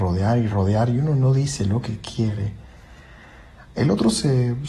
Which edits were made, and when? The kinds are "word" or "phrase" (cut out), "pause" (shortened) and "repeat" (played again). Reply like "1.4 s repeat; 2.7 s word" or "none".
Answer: none